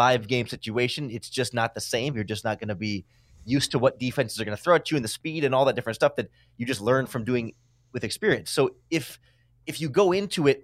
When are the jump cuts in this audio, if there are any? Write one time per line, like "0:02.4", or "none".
none